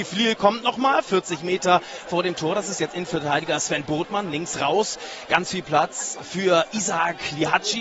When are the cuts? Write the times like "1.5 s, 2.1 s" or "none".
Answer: none